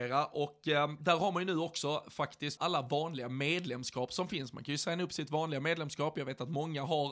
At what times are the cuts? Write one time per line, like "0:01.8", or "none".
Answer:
0:02.6